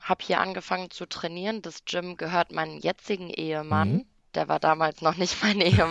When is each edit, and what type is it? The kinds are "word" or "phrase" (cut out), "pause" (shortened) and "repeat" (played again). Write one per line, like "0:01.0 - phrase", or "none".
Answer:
none